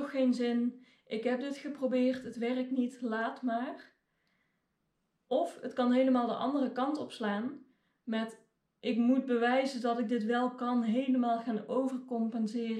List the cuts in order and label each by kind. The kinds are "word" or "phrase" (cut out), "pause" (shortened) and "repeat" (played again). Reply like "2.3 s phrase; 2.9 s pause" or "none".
none